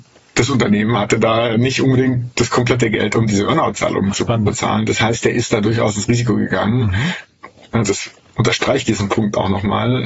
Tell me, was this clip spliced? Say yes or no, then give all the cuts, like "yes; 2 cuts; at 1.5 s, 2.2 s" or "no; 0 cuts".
yes; 1 cut; at 8.2 s